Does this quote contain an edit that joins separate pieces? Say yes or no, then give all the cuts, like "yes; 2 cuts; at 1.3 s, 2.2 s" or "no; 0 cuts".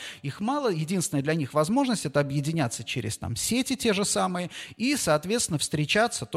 no; 0 cuts